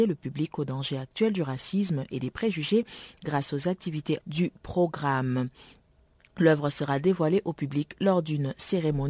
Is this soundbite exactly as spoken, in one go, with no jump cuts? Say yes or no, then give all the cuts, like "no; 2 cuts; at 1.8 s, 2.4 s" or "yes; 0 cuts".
no; 1 cut; at 4.2 s